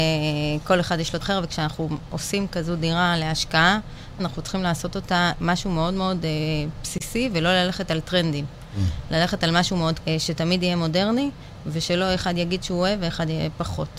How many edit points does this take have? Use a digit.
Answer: 5